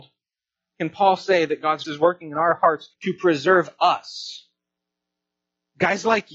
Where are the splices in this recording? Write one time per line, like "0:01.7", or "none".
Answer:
0:01.8
0:02.9